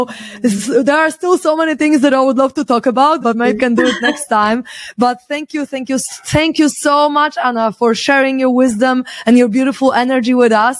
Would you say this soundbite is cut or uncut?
cut